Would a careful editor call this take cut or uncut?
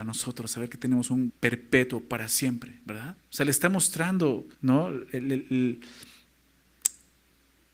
cut